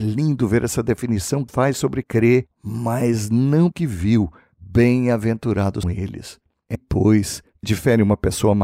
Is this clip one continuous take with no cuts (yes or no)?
no